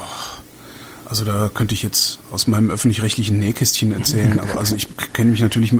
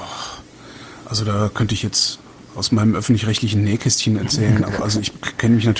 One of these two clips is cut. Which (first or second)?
first